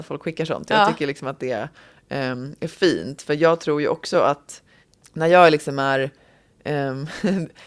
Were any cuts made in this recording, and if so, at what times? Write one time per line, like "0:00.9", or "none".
none